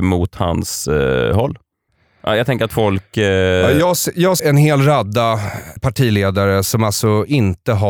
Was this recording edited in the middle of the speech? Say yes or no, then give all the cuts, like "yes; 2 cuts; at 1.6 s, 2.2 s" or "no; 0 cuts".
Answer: yes; 3 cuts; at 1.9 s, 4.4 s, 5.8 s